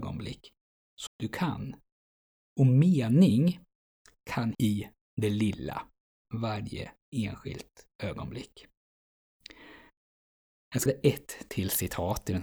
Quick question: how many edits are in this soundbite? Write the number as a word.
four